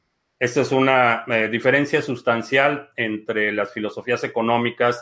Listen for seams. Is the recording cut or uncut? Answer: uncut